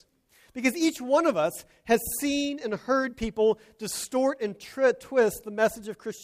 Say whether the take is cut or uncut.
uncut